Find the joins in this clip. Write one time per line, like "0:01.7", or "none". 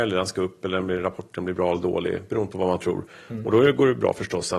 none